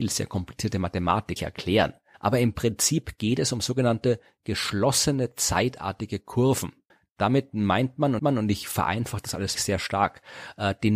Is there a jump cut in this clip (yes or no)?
yes